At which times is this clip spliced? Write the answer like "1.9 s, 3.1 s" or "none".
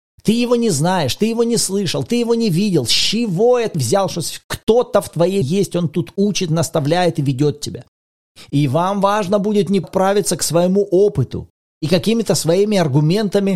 3.7 s, 5.4 s, 9.8 s